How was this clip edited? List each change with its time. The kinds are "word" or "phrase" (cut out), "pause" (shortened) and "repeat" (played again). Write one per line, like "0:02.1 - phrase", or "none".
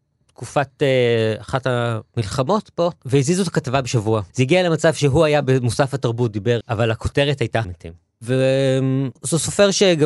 0:04.3 - pause
0:06.6 - phrase
0:07.6 - word